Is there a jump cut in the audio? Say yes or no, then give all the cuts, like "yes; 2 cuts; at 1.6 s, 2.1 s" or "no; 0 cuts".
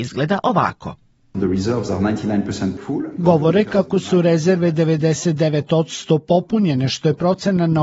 no; 0 cuts